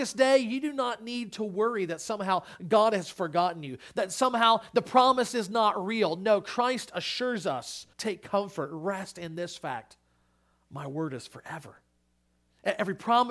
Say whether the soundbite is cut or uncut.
cut